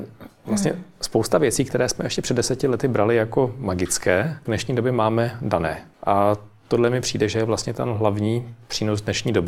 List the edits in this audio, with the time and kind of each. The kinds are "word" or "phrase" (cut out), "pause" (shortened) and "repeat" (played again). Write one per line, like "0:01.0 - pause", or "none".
0:04.5 - word
0:05.9 - pause